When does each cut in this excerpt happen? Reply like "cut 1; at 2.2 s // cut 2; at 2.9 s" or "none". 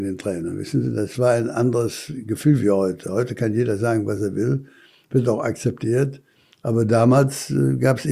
none

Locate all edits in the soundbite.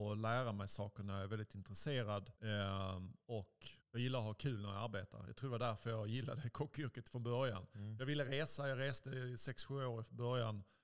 cut 1; at 2.4 s // cut 2; at 3.8 s

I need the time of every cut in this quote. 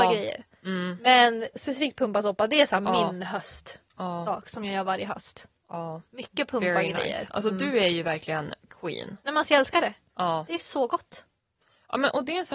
cut 1; at 8.7 s

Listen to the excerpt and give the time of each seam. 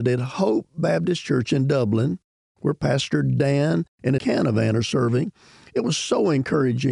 cut 1; at 4.2 s

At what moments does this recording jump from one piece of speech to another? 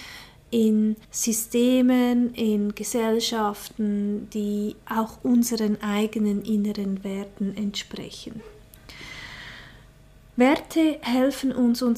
cut 1; at 1.0 s

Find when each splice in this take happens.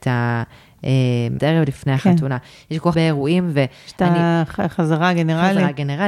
cut 1; at 1.4 s // cut 2; at 2.9 s

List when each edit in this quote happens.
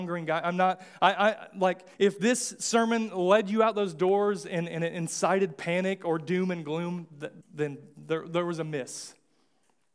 cut 1; at 1.9 s // cut 2; at 7.4 s

